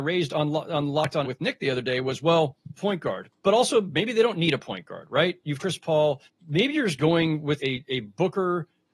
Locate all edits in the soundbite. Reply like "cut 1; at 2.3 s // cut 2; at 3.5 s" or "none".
cut 1; at 1.2 s // cut 2; at 2.8 s // cut 3; at 5.6 s // cut 4; at 6.3 s // cut 5; at 7.6 s